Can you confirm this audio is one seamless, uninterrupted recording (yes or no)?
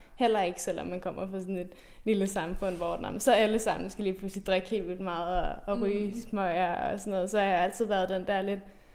yes